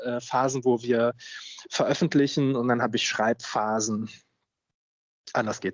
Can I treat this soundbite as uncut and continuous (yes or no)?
yes